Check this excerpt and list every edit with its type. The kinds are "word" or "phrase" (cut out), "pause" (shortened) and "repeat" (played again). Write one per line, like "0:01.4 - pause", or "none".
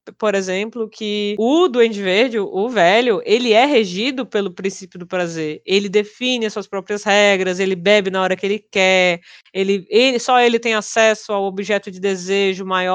none